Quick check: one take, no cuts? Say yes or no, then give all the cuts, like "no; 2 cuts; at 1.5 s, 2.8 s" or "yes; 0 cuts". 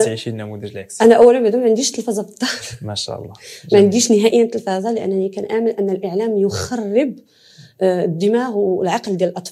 yes; 0 cuts